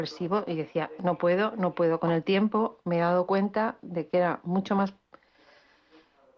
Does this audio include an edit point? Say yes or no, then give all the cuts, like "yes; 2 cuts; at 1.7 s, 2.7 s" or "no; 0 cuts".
no; 0 cuts